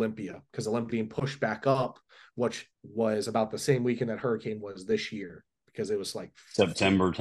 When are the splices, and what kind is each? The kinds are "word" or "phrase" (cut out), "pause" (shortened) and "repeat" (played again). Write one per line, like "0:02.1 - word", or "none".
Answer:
0:00.9 - word
0:02.7 - word